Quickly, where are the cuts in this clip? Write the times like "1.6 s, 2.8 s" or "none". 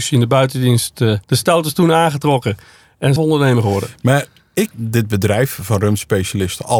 1.2 s, 3.2 s, 4.7 s